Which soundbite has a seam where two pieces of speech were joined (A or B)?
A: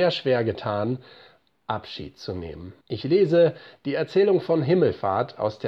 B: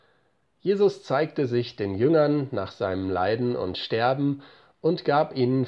A